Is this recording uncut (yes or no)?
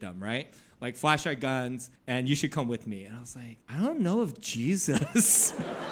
no